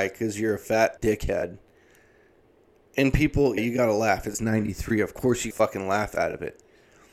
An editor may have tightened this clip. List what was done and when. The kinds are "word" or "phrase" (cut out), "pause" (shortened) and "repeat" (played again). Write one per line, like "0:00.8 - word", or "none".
0:01.0 - word
0:03.6 - word
0:05.5 - word